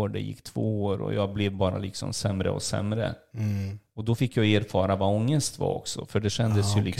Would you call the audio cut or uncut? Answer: uncut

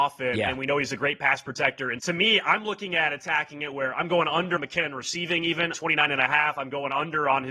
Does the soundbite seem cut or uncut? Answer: cut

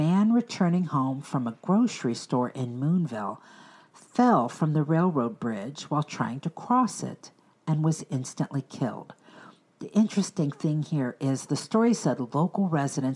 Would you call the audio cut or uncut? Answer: uncut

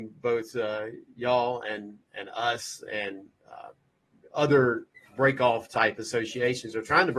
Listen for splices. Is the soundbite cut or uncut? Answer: cut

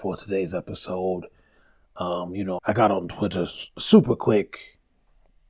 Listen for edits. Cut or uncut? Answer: cut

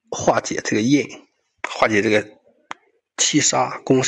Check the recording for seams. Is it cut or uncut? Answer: uncut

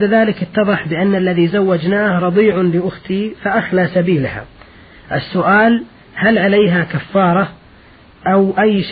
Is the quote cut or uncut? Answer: uncut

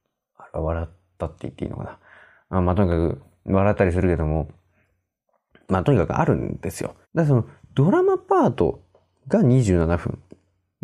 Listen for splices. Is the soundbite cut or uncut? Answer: cut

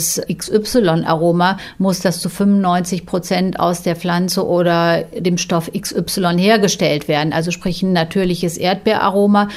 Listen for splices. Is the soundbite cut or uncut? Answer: uncut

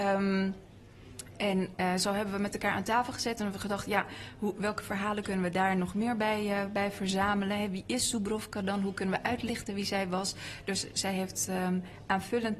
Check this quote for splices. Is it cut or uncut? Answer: uncut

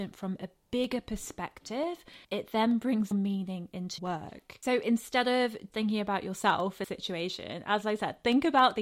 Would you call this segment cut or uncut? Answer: cut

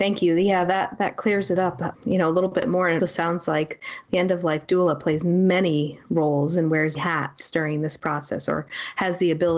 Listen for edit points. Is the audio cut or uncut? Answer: cut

